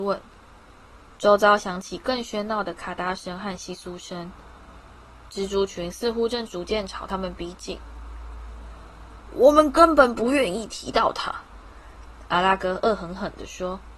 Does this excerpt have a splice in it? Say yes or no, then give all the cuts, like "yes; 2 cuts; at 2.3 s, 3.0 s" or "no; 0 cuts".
yes; 1 cut; at 1.1 s